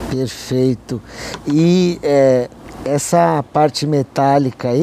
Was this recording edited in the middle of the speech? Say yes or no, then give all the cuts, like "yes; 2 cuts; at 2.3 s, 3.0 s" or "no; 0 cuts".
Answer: no; 0 cuts